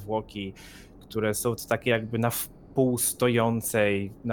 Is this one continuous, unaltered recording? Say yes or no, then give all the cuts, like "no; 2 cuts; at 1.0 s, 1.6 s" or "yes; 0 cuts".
yes; 0 cuts